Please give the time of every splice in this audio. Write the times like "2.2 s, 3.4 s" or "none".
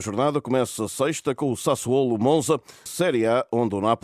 2.9 s